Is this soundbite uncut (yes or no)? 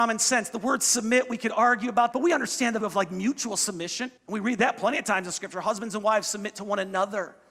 no